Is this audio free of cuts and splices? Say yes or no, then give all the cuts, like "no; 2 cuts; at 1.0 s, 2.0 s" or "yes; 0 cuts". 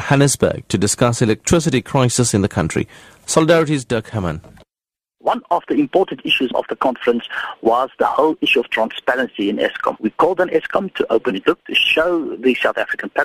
yes; 0 cuts